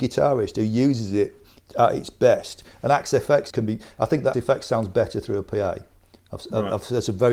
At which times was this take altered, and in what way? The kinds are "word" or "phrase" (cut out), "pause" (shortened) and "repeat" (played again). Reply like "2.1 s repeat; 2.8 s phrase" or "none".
3.5 s word; 4.3 s word